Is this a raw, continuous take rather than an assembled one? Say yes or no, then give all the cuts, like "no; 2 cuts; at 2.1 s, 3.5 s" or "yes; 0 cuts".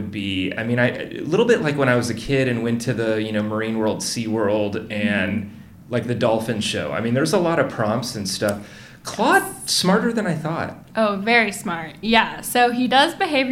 yes; 0 cuts